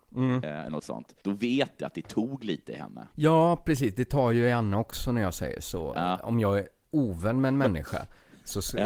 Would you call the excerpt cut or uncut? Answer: cut